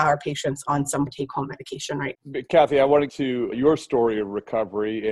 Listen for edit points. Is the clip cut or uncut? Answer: cut